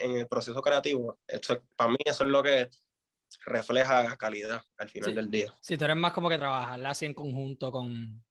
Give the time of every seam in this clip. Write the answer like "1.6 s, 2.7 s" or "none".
1.2 s, 4.7 s, 5.6 s